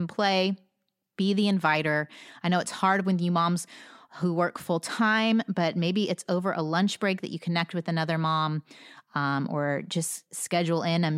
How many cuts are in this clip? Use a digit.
0